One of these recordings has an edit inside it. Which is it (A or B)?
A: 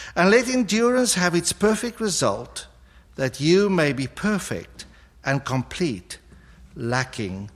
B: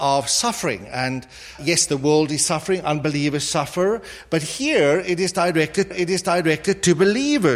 B